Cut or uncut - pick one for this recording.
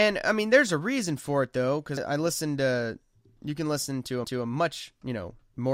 cut